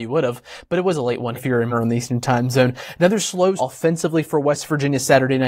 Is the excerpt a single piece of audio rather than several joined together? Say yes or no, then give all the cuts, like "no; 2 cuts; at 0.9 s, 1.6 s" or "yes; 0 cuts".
no; 3 cuts; at 1.4 s, 1.7 s, 3.6 s